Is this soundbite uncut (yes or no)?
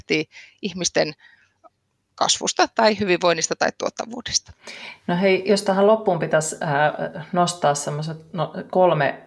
yes